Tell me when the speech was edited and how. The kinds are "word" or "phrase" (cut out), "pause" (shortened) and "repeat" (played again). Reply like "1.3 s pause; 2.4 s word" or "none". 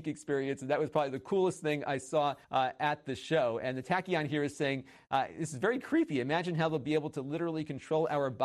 2.4 s pause